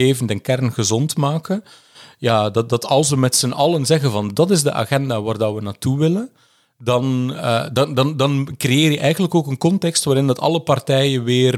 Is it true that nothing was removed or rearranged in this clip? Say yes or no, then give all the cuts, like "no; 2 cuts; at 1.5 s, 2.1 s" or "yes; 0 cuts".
yes; 0 cuts